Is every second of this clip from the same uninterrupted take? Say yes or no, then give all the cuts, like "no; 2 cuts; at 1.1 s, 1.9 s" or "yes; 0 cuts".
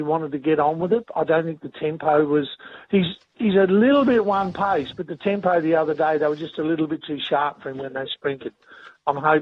yes; 0 cuts